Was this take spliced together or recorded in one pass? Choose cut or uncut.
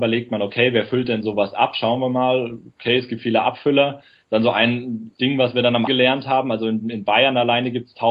cut